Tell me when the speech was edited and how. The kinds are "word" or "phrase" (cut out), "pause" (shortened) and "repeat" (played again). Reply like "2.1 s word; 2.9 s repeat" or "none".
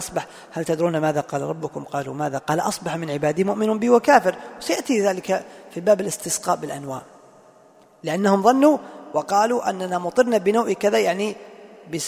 2.4 s word